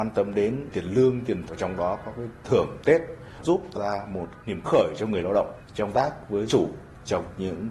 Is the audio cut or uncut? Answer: cut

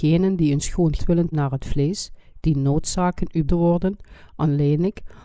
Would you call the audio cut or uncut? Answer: cut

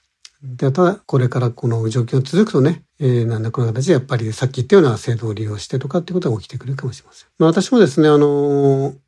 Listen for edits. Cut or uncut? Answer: cut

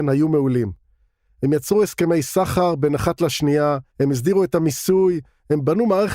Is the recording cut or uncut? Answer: cut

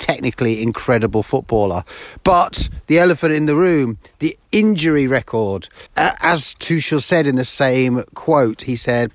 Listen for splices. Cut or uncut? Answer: cut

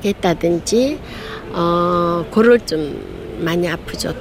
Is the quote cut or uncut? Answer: cut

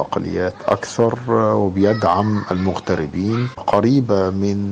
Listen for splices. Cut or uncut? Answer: cut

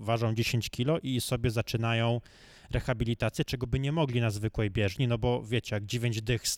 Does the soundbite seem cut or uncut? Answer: uncut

